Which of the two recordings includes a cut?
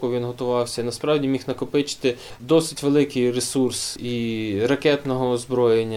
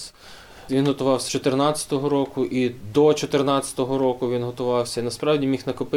second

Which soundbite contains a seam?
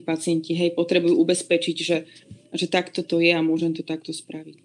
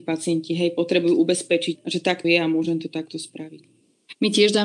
second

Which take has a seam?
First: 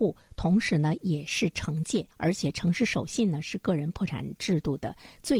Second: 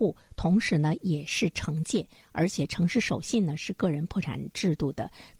first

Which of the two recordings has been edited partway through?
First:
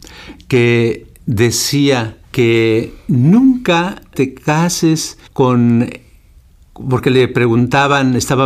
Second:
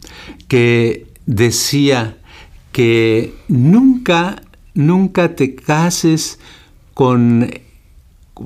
first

